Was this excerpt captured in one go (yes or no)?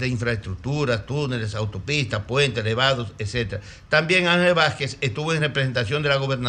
yes